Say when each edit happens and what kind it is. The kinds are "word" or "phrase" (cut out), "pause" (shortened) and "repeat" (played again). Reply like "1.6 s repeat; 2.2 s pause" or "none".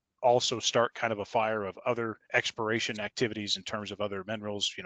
2.2 s pause